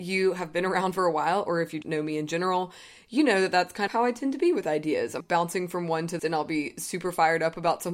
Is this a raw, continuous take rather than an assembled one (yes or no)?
no